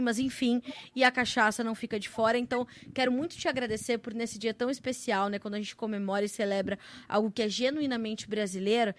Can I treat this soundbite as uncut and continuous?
yes; 0 cuts

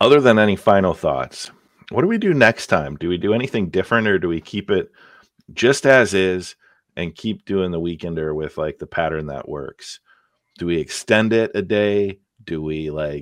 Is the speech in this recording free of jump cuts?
yes; 0 cuts

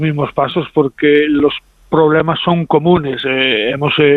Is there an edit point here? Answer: no; 0 cuts

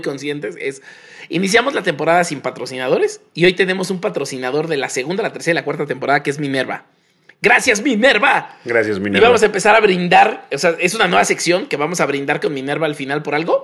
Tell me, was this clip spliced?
no; 0 cuts

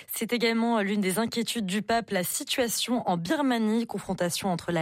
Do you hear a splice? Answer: no; 0 cuts

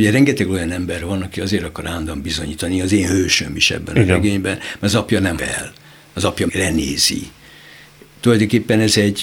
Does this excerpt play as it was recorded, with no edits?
no; 2 cuts; at 5.4 s, 6.5 s

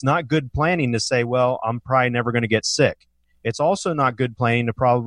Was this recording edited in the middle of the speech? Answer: no; 0 cuts

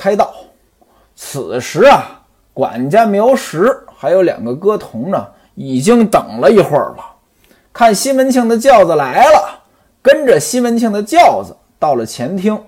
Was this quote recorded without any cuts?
yes; 0 cuts

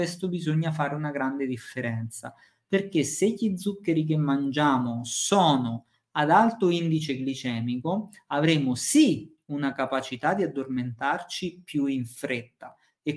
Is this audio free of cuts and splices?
yes; 0 cuts

